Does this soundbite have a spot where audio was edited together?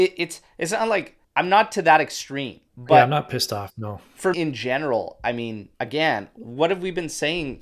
yes; 4 cuts; at 1.2 s, 2.7 s, 4.3 s, 5.7 s

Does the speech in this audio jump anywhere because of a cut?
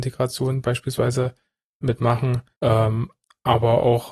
yes; 1 cut; at 2.5 s

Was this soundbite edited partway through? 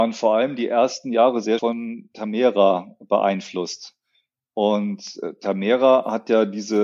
yes; 1 cut; at 1.6 s

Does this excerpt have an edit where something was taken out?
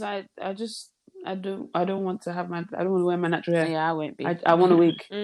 no; 0 cuts

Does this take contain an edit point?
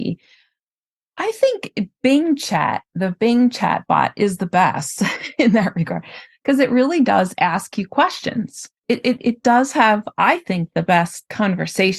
yes; 1 cut; at 8.8 s

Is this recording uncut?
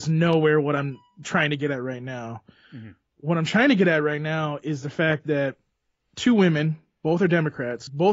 yes; 0 cuts

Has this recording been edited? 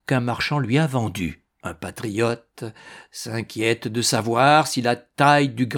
yes; 1 cut; at 1.5 s

